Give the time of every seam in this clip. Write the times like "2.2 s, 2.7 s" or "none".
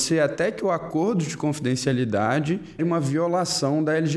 2.8 s

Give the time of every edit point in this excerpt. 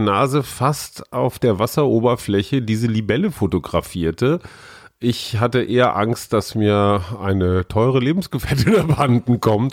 none

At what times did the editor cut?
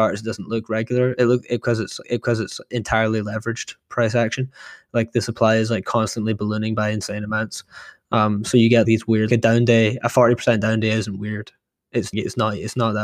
2.0 s, 8.8 s, 9.3 s, 12.1 s

